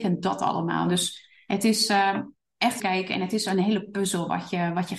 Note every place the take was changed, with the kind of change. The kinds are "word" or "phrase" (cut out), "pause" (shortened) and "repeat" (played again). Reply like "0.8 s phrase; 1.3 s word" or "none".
2.8 s phrase